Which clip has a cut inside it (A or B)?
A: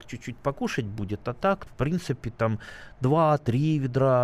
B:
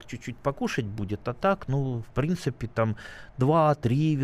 A